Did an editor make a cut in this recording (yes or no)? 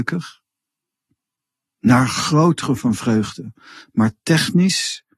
yes